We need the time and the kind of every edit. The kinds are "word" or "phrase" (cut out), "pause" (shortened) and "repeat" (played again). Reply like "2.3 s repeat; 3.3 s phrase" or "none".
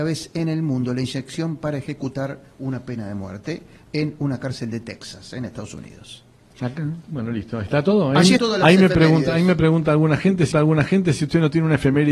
8.4 s word; 10.5 s repeat

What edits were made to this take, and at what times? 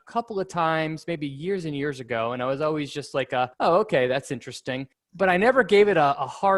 3.5 s pause; 4.9 s pause

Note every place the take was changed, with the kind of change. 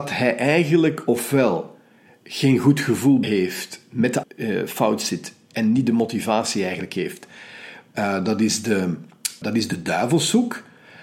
3.2 s word; 4.2 s word; 9.4 s word

